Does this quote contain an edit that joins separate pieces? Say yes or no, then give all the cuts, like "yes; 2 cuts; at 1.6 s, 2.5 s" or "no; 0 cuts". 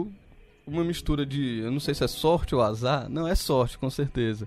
no; 0 cuts